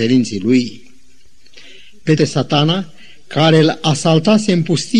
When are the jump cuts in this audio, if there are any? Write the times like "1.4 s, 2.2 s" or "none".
2.2 s